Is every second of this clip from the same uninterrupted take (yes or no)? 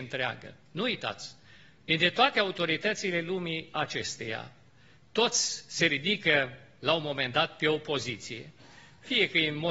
yes